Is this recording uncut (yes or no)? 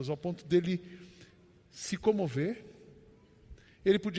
yes